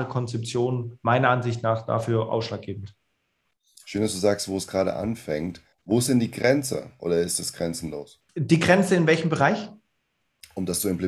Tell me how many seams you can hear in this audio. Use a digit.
2